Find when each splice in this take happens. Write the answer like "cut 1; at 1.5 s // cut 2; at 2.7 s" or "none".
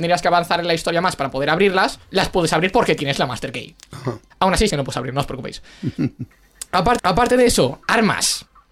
cut 1; at 2.1 s // cut 2; at 4.3 s // cut 3; at 4.7 s // cut 4; at 7.0 s